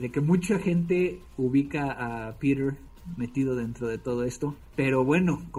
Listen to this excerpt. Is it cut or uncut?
uncut